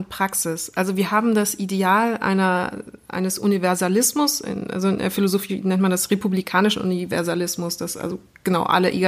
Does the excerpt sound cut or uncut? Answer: uncut